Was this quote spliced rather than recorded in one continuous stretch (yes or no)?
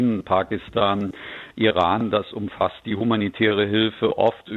no